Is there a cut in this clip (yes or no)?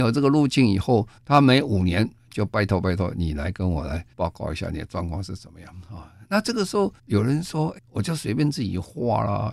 yes